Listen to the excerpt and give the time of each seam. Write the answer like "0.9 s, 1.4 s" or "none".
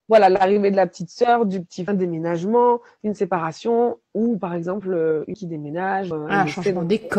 1.9 s, 5.3 s, 6.1 s

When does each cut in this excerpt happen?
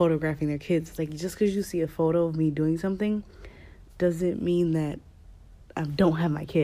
none

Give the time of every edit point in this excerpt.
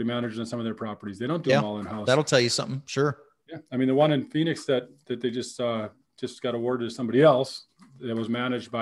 none

